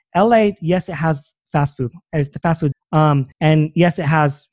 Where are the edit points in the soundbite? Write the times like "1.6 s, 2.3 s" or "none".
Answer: 2.7 s, 3.3 s